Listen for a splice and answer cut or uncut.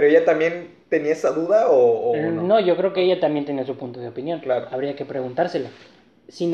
uncut